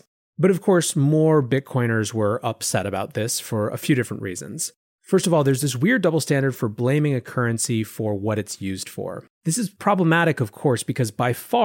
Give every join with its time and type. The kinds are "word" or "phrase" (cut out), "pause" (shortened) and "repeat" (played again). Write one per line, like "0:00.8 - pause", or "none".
0:09.3 - pause